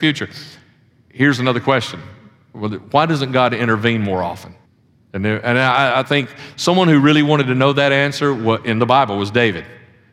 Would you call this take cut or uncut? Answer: cut